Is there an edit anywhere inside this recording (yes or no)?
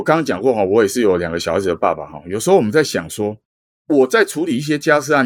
yes